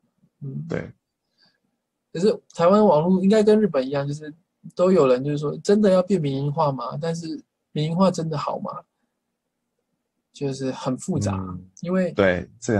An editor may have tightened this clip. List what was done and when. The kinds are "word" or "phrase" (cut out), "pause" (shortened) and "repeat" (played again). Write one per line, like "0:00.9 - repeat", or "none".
none